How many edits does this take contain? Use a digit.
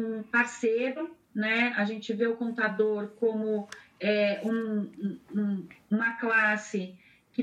0